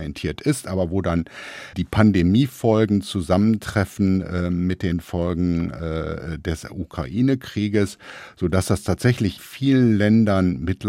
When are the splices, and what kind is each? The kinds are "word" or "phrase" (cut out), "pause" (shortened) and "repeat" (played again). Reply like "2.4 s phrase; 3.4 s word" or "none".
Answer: 1.7 s word; 9.4 s word